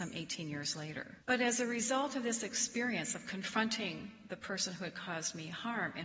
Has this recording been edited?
yes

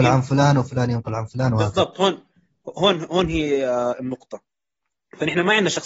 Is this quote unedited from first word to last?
yes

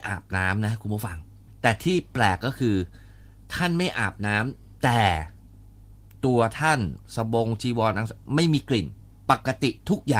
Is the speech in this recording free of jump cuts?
yes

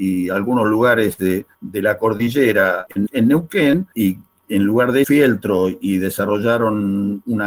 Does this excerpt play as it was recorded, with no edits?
no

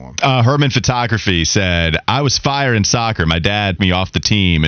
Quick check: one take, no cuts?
no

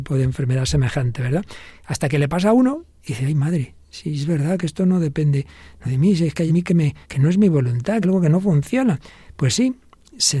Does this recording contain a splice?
yes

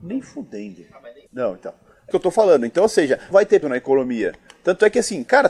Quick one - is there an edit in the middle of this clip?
yes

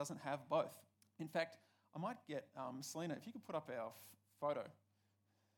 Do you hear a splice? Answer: yes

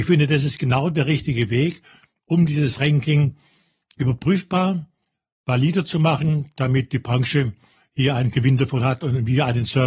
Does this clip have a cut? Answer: no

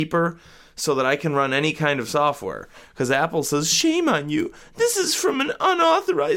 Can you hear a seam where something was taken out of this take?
no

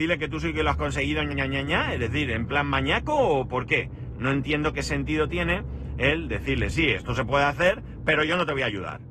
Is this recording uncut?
no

